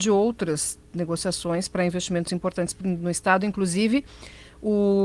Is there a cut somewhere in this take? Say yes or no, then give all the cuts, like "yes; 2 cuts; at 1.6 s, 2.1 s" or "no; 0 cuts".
no; 0 cuts